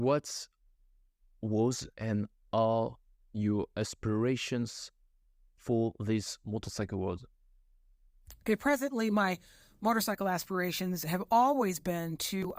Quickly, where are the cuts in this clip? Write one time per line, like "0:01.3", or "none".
0:01.9